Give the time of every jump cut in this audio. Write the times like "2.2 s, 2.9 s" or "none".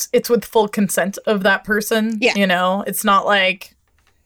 none